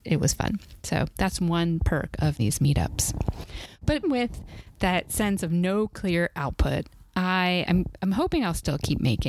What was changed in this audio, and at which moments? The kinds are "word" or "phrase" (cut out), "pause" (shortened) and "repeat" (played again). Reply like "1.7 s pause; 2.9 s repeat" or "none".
2.4 s word; 4.0 s word; 7.6 s word

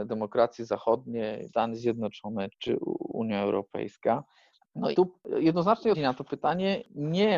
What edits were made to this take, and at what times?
1.5 s word; 2.5 s word; 4.9 s word; 5.9 s word

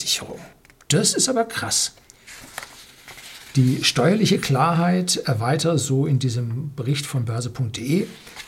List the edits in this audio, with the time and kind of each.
none

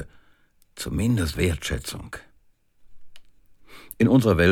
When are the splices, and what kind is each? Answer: 1.3 s word

